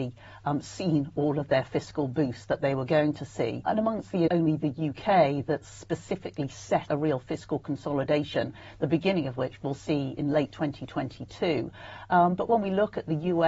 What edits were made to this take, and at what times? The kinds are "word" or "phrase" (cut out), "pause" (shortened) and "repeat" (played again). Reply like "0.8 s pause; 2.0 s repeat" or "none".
4.3 s phrase; 6.9 s word